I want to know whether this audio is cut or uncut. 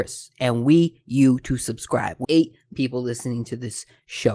cut